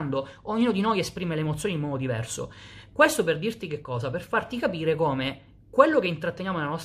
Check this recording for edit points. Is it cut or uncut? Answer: uncut